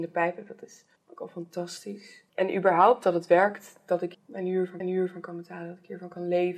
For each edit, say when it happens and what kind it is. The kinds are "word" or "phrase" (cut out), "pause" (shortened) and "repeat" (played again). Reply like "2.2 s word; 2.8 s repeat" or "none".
1.0 s pause; 4.1 s word; 4.8 s repeat